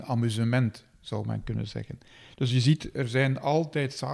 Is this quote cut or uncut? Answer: uncut